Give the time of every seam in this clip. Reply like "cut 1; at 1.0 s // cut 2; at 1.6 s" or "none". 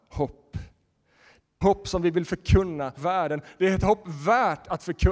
cut 1; at 1.6 s // cut 2; at 3.0 s